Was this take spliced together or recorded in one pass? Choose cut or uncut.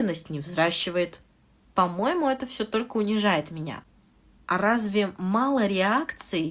uncut